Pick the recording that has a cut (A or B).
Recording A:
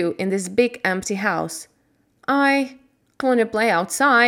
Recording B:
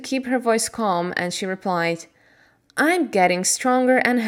A